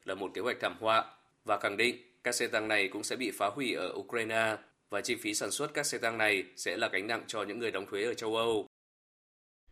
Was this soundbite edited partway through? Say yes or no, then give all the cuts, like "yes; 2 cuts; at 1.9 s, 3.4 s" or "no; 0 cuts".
no; 0 cuts